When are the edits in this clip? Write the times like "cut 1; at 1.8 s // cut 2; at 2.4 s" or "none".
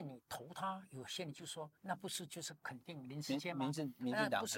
cut 1; at 1.8 s